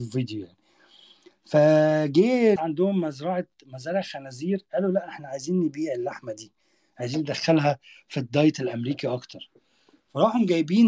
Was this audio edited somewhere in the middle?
yes; 1 cut; at 2.6 s

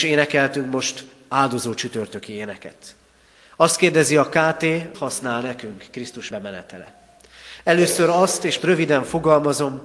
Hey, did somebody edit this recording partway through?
yes; 3 cuts; at 4.9 s, 6.3 s, 8.6 s

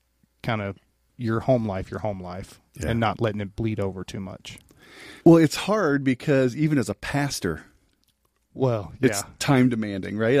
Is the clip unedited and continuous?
no; 2 cuts; at 2.7 s, 5.2 s

